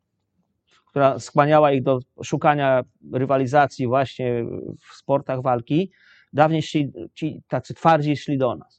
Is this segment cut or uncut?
uncut